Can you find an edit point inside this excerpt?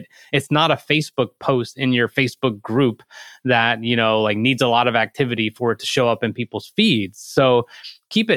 no; 0 cuts

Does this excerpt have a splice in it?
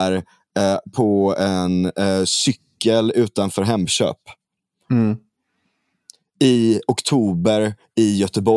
no; 0 cuts

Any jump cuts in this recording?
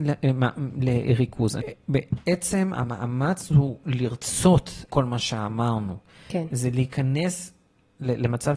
yes; 2 cuts; at 1.6 s, 4.9 s

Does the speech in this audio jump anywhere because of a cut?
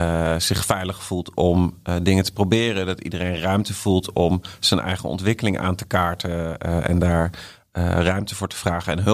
no; 0 cuts

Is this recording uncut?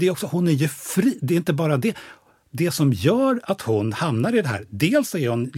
yes; 0 cuts

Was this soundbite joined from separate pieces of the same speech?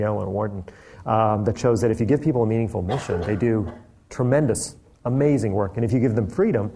no; 0 cuts

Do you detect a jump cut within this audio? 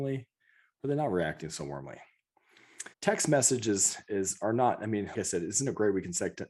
yes; 2 cuts; at 2.9 s, 5.1 s

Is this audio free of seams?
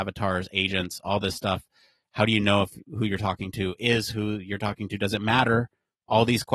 yes; 0 cuts

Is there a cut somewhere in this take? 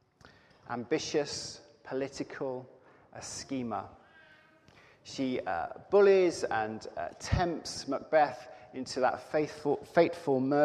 no; 0 cuts

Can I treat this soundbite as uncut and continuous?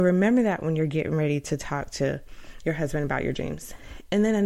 yes; 0 cuts

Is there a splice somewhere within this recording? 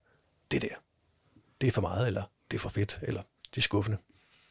yes; 1 cut; at 3.4 s

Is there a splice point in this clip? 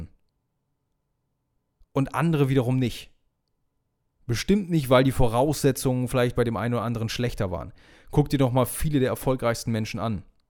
no; 0 cuts

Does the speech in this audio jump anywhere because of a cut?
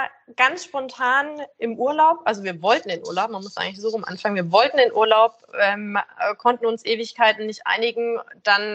no; 0 cuts

